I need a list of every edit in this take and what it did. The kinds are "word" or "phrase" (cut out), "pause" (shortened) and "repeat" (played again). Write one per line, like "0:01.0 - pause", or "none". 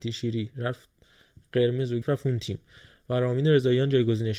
0:02.0 - word